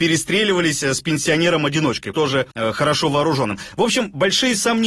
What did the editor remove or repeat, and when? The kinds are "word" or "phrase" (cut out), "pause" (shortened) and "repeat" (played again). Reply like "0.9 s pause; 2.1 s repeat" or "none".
2.1 s word; 2.5 s pause